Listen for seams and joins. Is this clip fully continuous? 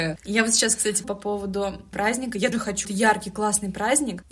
no; 4 cuts; at 1.0 s, 1.9 s, 2.5 s, 2.8 s

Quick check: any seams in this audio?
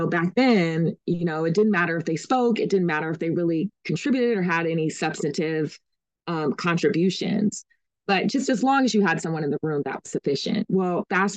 no; 0 cuts

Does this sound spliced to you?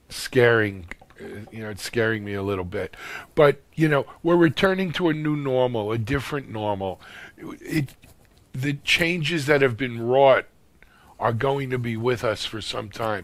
no; 0 cuts

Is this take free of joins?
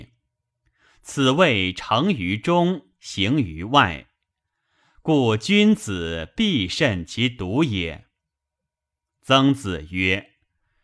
yes; 0 cuts

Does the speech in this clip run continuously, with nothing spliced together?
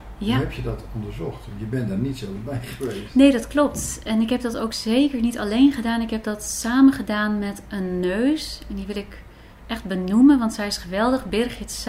yes; 0 cuts

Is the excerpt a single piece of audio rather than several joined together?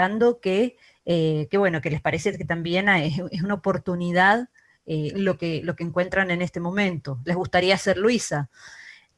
yes; 0 cuts

